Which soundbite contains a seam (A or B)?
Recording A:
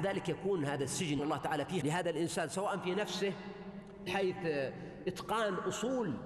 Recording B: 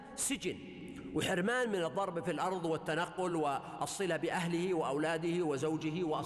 A